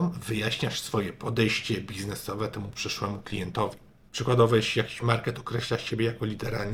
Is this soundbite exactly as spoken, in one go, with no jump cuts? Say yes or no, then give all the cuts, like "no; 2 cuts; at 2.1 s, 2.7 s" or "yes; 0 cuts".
yes; 0 cuts